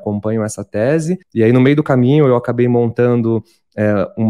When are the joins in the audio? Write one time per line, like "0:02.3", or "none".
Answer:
0:01.2